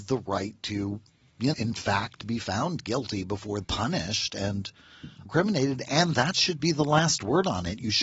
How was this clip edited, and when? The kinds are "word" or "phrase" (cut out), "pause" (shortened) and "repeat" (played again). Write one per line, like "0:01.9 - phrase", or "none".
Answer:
0:01.5 - word
0:03.6 - word
0:05.3 - word
0:06.1 - word